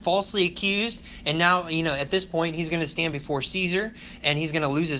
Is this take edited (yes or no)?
no